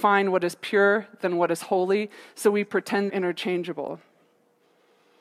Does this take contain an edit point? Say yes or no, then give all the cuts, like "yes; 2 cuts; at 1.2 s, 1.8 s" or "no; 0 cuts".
yes; 1 cut; at 3.1 s